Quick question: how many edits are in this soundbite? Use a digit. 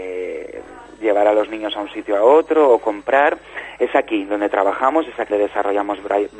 1